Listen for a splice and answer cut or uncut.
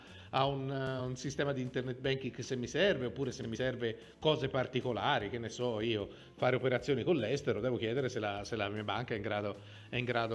uncut